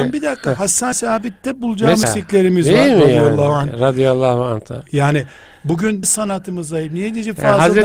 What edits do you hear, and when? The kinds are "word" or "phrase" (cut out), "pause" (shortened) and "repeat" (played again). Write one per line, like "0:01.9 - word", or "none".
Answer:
0:00.9 - word
0:02.0 - word
0:06.0 - word